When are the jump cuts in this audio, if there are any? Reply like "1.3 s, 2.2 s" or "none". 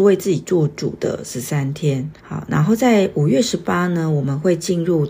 2.2 s

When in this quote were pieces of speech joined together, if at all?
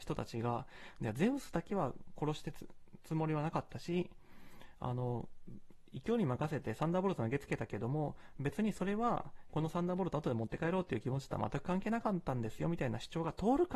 9.5 s

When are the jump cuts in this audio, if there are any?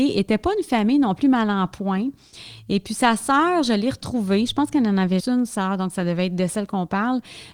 5.2 s

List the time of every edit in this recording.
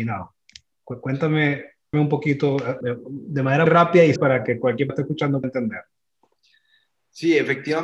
1.9 s, 2.8 s, 3.7 s, 4.2 s, 4.9 s, 5.4 s

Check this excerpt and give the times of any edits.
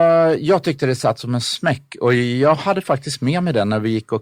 none

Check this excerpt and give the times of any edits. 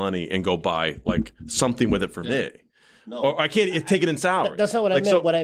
none

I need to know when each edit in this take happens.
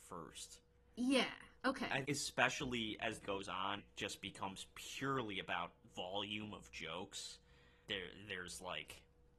2.0 s, 3.2 s, 3.8 s, 5.9 s, 7.9 s

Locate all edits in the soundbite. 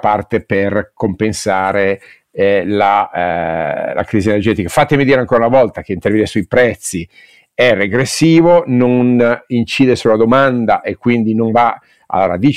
none

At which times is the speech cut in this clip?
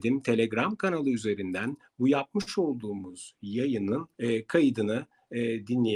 4.1 s

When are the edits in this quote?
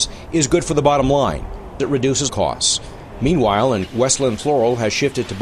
1.8 s, 2.3 s, 3.9 s

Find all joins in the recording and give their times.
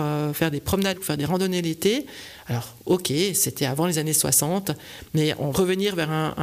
0.9 s, 5.5 s

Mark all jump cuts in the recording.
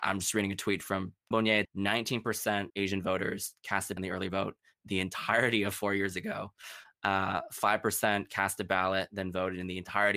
1.3 s, 1.6 s, 2.7 s, 4.0 s, 4.8 s

